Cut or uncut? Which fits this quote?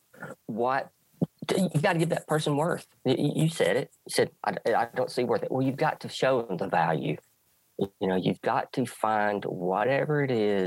uncut